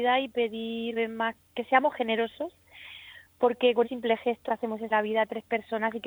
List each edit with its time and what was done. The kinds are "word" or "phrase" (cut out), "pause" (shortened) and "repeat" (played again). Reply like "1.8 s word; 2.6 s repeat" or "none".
1.0 s word; 1.4 s word; 3.8 s word; 4.5 s word; 4.9 s word